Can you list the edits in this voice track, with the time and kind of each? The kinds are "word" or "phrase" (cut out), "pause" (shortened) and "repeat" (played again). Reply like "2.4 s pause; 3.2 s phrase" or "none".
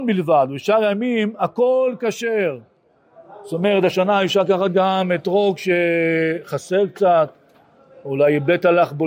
none